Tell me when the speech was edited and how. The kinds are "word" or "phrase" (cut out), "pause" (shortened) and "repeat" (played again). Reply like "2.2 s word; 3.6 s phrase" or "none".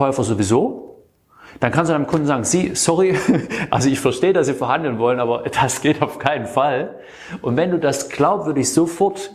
none